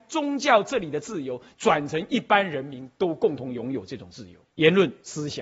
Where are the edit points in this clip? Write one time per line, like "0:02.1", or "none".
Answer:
0:04.4